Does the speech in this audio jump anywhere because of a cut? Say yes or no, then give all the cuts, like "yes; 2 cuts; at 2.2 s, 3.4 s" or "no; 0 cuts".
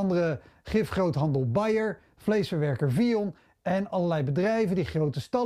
no; 0 cuts